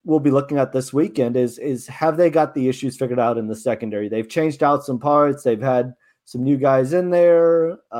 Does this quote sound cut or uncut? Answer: uncut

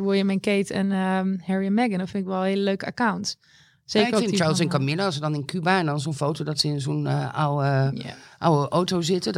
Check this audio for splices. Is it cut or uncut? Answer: uncut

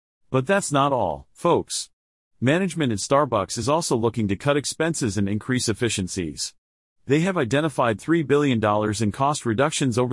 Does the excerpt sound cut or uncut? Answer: uncut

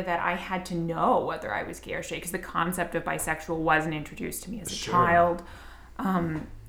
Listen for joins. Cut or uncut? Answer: uncut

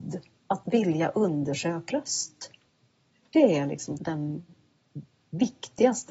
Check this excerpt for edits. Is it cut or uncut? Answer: cut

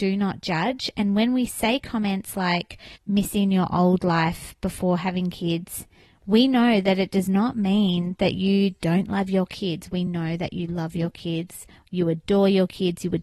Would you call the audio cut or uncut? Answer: uncut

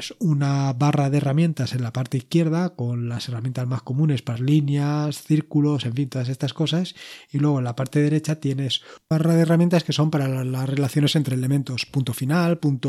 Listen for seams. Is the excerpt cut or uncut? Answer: cut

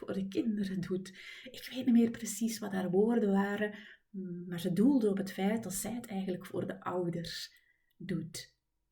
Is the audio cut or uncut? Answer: uncut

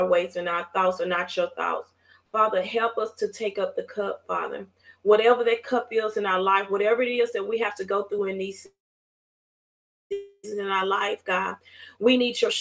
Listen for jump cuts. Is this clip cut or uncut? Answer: uncut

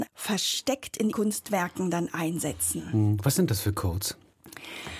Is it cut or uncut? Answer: cut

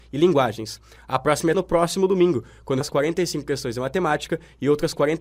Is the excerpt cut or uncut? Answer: cut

